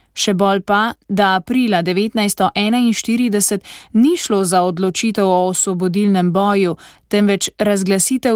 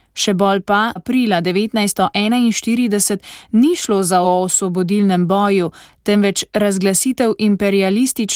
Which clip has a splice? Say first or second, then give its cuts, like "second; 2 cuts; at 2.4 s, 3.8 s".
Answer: second; 2 cuts; at 1.0 s, 4.2 s